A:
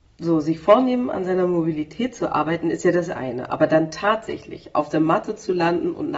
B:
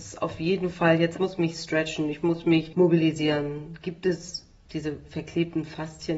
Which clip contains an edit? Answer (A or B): B